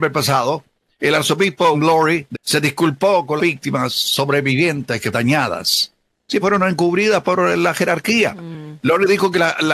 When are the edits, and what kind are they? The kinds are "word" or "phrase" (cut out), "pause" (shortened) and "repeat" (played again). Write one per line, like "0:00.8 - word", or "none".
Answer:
0:01.7 - word
0:02.3 - word
0:03.4 - word
0:05.1 - word
0:06.4 - word
0:07.2 - word